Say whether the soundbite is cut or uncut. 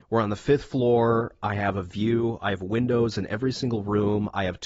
uncut